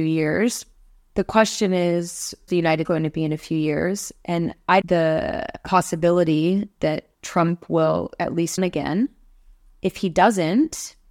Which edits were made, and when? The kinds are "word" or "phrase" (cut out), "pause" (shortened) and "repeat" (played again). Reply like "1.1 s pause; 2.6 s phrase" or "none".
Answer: 2.5 s word; 2.8 s word; 4.8 s phrase; 7.1 s pause; 8.6 s word